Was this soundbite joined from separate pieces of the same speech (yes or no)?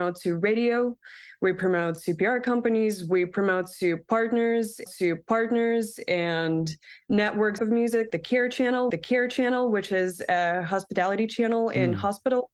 yes